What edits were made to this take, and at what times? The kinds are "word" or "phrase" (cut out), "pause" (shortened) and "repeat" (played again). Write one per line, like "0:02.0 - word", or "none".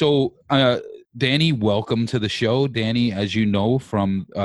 0:01.0 - pause